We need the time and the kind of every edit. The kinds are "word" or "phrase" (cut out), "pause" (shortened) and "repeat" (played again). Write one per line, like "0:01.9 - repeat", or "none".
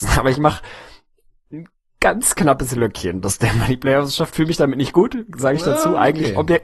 none